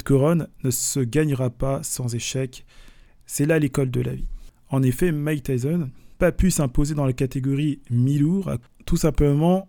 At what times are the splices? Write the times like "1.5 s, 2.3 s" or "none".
6.1 s